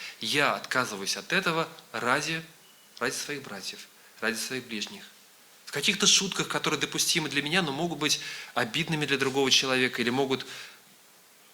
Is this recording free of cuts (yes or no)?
yes